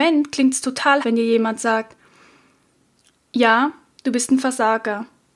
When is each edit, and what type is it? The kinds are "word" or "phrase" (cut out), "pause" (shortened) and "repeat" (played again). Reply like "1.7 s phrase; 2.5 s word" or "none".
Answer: 1.0 s word

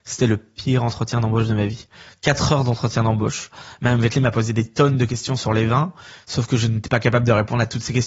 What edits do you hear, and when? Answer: none

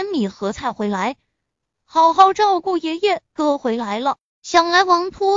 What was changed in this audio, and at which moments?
none

